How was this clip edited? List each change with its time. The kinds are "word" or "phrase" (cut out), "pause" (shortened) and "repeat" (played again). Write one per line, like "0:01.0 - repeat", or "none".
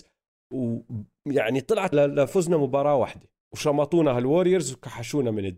0:01.9 - word
0:03.4 - pause